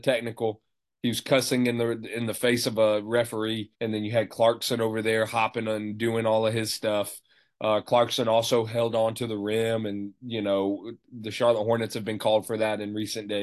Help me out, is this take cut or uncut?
cut